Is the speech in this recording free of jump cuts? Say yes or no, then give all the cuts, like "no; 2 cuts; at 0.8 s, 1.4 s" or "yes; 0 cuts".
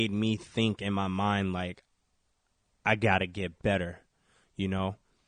yes; 0 cuts